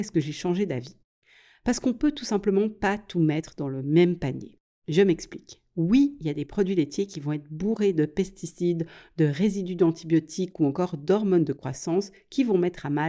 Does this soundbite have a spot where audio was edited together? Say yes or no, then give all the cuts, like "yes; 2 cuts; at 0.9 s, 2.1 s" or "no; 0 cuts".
no; 0 cuts